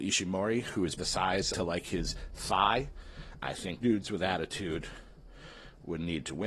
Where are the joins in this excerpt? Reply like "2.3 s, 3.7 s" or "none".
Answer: 1.0 s, 1.5 s, 3.3 s, 3.8 s